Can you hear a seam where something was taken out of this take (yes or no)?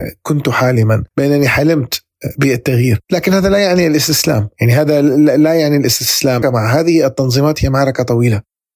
yes